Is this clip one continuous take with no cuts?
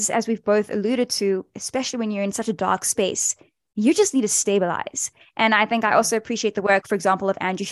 yes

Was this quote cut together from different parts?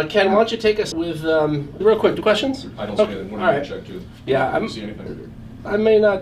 yes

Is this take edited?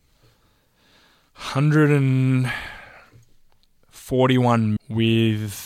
yes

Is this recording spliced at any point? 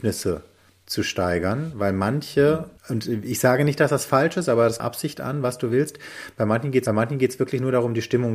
yes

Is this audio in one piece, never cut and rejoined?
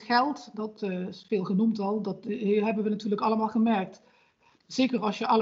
yes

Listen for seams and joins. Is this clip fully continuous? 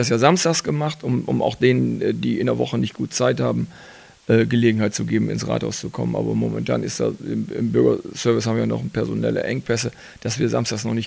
yes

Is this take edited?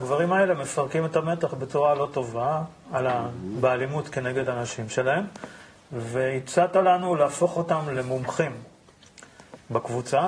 no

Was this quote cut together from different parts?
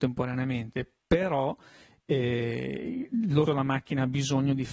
yes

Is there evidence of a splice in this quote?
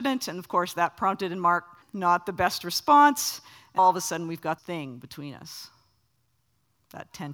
yes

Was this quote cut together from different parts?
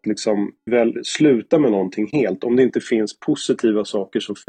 no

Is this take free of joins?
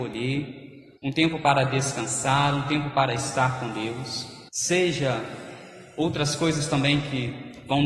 no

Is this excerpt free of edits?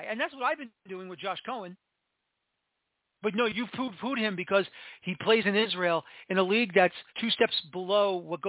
no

